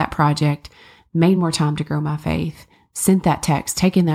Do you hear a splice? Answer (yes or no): no